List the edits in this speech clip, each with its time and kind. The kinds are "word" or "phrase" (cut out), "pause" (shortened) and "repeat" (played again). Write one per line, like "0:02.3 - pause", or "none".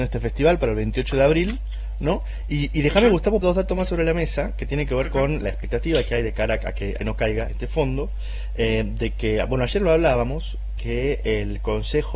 0:03.4 - word
0:05.4 - word
0:07.0 - phrase
0:07.5 - word